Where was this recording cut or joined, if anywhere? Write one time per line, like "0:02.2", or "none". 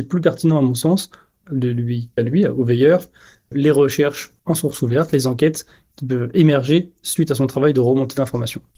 0:02.2